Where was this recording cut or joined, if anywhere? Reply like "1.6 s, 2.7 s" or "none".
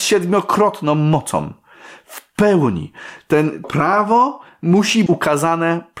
3.6 s, 5.1 s